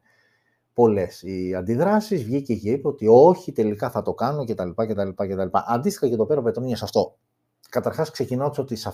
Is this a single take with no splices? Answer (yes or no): yes